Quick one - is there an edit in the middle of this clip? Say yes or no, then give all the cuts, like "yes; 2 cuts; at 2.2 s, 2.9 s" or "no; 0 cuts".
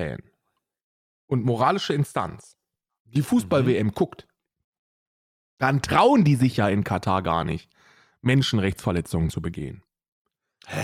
no; 0 cuts